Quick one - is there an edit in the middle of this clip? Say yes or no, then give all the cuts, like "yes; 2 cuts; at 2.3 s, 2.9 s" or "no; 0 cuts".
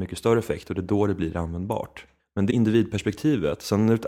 yes; 2 cuts; at 2.2 s, 2.5 s